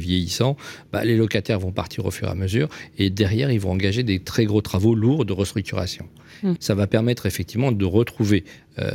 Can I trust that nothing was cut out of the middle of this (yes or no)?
no